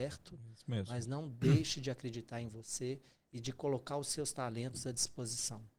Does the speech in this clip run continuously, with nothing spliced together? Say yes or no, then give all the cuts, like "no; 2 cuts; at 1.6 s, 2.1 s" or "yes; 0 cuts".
yes; 0 cuts